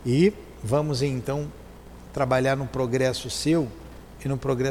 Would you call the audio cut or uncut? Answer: uncut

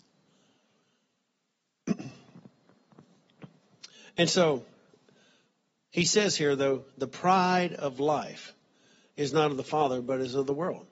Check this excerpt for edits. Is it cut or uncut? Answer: uncut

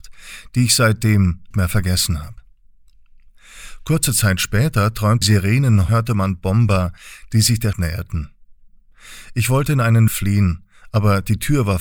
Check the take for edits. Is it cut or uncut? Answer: cut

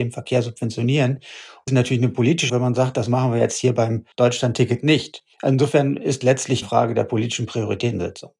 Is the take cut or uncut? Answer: cut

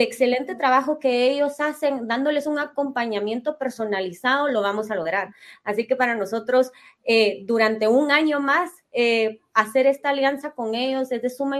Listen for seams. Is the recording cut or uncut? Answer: uncut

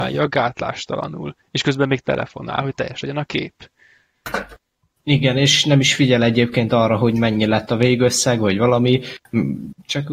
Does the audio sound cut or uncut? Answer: uncut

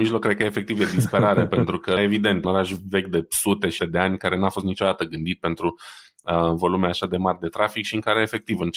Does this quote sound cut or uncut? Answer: cut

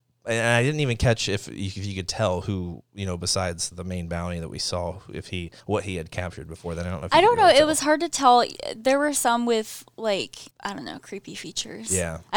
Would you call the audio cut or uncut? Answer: cut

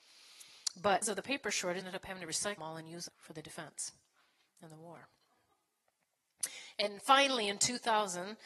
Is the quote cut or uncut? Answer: cut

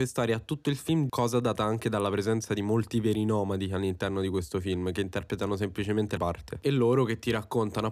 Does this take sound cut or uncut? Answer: cut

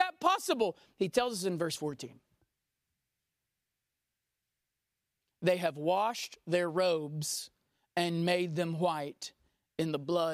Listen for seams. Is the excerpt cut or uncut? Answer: uncut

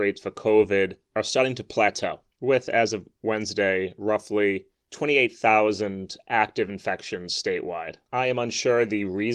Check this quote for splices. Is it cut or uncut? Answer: uncut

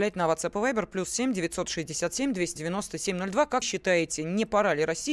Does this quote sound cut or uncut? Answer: cut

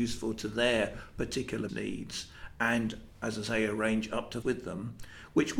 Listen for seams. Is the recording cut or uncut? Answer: cut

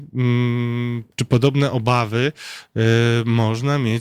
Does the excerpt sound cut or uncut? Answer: uncut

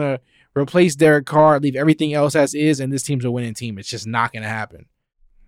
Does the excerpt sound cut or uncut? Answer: uncut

